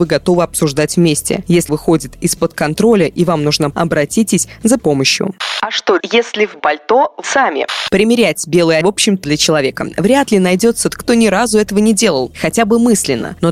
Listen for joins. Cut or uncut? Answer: cut